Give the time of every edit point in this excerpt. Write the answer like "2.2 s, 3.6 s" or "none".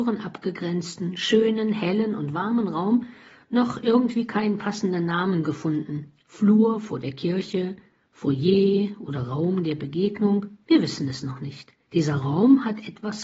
10.6 s, 11.8 s